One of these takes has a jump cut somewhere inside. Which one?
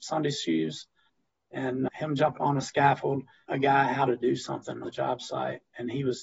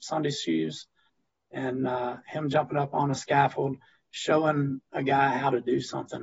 first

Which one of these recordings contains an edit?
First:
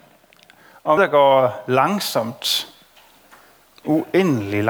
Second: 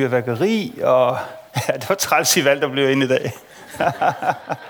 first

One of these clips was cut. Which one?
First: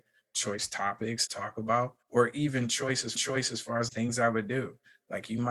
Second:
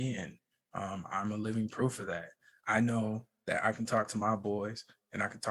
first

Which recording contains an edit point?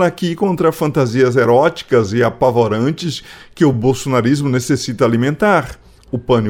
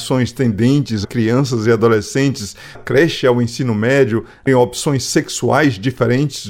second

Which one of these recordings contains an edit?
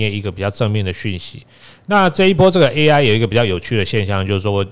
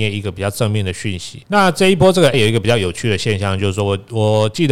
second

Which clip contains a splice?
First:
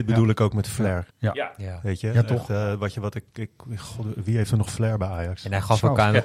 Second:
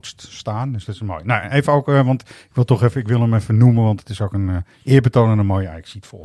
first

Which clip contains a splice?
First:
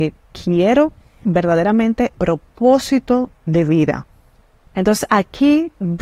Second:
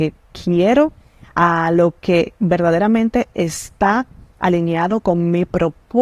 first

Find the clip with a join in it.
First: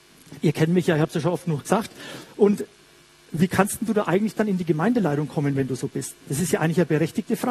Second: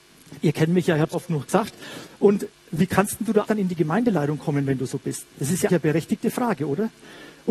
second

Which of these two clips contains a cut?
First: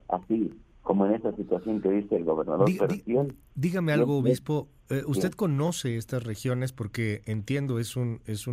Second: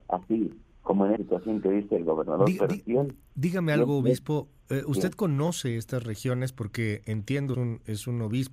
second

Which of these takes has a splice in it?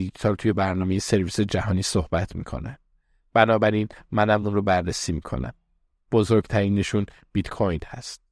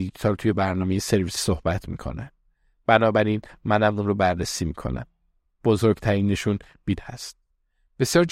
second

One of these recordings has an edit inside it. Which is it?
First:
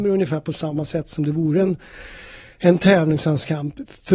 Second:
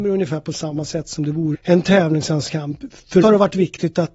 second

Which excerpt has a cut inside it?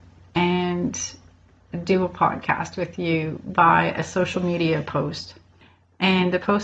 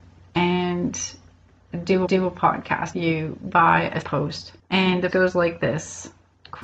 second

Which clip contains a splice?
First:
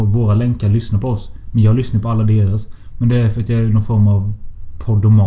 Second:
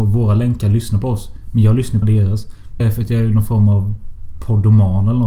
second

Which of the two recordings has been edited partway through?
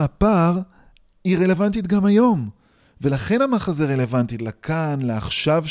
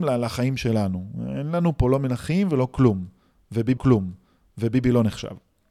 second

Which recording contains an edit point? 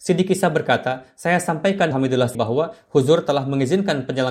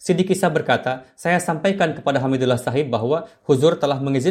first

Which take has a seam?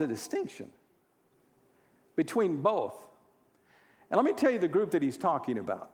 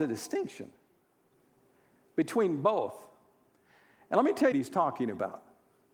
second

